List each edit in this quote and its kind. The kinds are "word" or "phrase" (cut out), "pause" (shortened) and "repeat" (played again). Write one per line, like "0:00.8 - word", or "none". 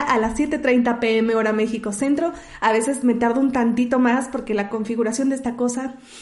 none